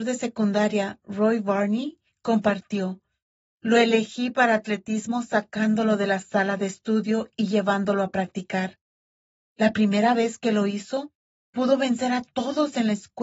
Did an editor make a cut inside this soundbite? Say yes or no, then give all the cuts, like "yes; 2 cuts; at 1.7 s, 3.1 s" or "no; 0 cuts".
no; 0 cuts